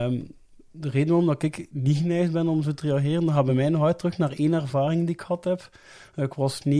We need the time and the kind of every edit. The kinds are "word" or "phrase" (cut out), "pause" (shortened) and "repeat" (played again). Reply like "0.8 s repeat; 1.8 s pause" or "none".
none

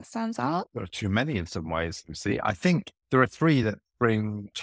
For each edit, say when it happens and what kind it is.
none

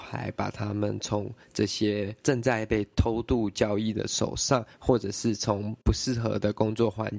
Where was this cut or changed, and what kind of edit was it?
2.2 s pause; 5.8 s pause

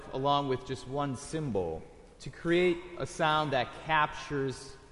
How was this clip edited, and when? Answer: 2.1 s pause

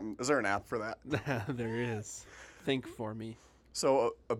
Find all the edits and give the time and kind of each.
none

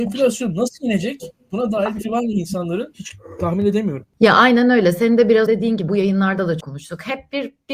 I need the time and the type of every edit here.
2.0 s word; 5.5 s word; 5.9 s word; 6.6 s word

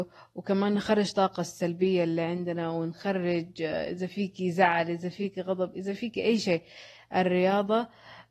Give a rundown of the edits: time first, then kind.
none

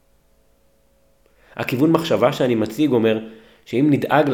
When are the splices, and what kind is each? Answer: none

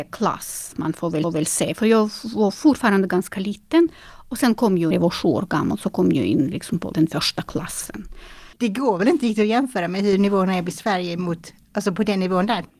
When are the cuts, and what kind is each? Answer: 1.2 s repeat; 4.9 s phrase; 6.9 s word; 8.5 s pause

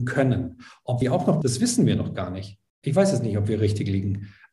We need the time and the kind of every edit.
1.0 s phrase; 1.4 s word

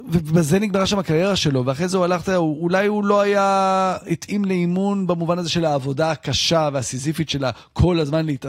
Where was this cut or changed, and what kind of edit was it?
none

